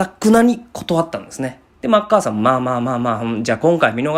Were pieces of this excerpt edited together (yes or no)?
yes